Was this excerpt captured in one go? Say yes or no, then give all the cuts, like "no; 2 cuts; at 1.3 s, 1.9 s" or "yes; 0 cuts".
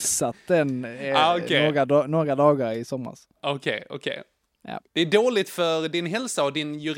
no; 2 cuts; at 3.4 s, 4.9 s